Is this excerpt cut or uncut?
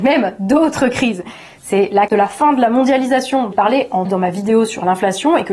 cut